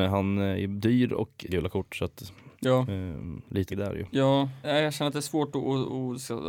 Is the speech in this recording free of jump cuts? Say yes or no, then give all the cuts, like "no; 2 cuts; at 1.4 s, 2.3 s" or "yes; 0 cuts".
no; 4 cuts; at 1.5 s, 2.5 s, 3.7 s, 4.6 s